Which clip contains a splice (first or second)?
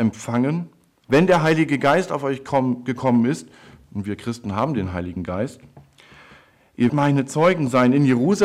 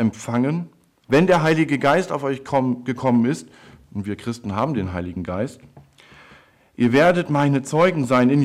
first